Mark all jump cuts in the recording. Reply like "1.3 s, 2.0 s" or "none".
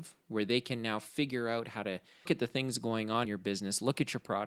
2.3 s, 3.3 s